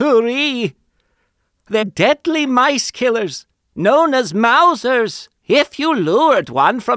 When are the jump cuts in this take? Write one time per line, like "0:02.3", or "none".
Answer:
0:01.8
0:05.4